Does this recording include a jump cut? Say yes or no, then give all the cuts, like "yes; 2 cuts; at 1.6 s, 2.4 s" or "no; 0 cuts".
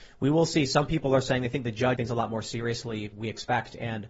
yes; 2 cuts; at 2.0 s, 3.1 s